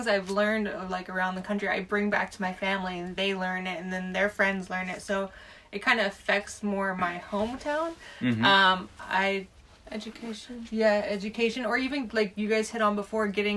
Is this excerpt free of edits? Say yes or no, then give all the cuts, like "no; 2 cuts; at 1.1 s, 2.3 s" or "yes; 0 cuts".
yes; 0 cuts